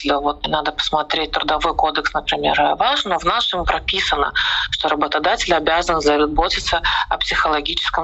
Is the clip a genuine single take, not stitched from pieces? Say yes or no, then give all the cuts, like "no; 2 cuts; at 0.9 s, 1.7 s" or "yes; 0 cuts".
yes; 0 cuts